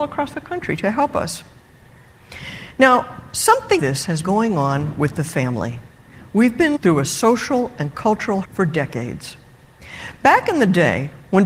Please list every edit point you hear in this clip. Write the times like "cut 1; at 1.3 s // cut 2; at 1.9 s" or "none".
cut 1; at 3.8 s // cut 2; at 4.2 s // cut 3; at 6.8 s // cut 4; at 8.4 s